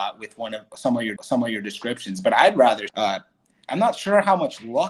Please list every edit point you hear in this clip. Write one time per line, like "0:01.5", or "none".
0:01.2
0:02.9